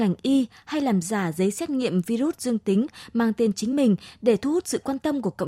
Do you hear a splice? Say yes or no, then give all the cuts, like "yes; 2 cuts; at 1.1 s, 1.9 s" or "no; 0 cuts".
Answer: no; 0 cuts